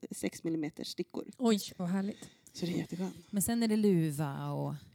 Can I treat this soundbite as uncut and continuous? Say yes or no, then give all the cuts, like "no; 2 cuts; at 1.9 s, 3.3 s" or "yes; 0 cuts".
no; 1 cut; at 1.8 s